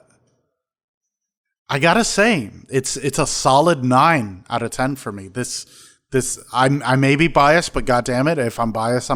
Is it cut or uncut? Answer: uncut